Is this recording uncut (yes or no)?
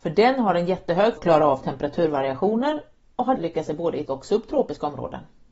no